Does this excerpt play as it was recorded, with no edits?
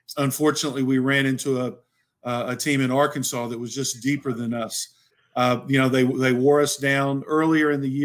yes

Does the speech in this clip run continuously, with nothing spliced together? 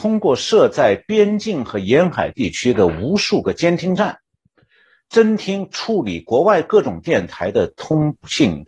yes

